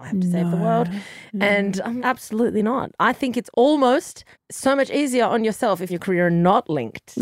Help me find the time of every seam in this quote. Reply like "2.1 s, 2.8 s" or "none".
2.0 s, 3.5 s, 4.3 s, 5.9 s